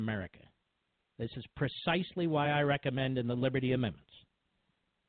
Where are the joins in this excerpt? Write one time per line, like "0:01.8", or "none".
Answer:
none